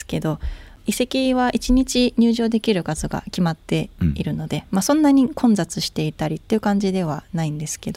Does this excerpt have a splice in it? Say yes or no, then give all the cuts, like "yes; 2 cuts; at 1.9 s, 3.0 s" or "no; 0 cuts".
no; 0 cuts